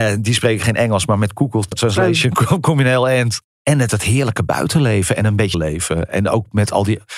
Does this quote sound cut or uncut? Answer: cut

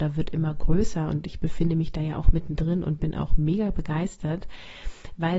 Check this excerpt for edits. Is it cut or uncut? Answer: uncut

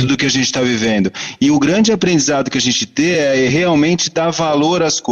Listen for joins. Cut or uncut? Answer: uncut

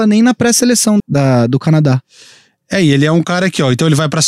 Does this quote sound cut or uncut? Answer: cut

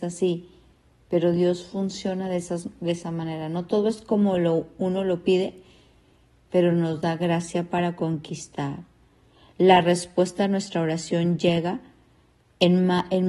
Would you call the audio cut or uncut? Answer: uncut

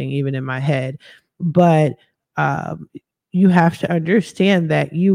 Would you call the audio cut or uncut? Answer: uncut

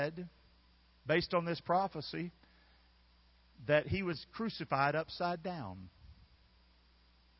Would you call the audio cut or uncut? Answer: uncut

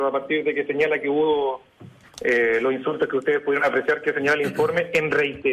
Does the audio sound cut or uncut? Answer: uncut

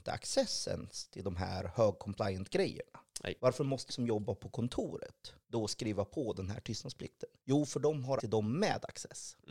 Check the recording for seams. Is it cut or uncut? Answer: cut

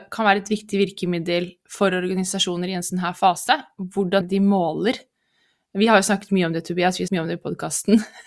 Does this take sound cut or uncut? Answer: cut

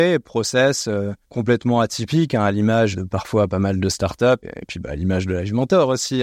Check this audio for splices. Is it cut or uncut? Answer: cut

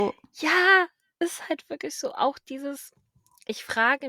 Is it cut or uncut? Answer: uncut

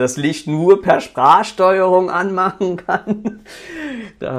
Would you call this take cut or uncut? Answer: uncut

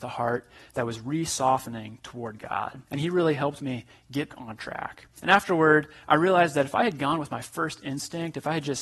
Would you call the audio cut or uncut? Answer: cut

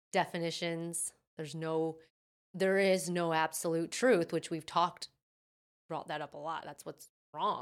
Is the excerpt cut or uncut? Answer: uncut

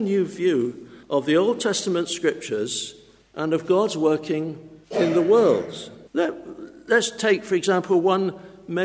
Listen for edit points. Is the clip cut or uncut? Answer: cut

